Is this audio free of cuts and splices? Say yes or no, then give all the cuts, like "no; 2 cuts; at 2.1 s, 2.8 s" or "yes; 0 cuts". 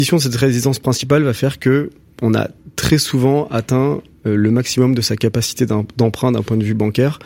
yes; 0 cuts